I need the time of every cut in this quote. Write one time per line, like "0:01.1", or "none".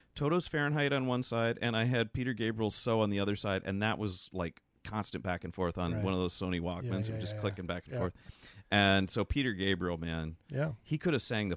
none